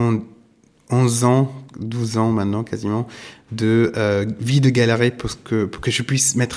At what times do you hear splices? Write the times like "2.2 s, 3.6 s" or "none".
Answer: 1.7 s